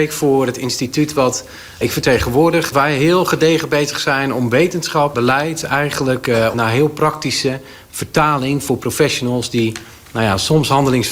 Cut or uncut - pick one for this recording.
cut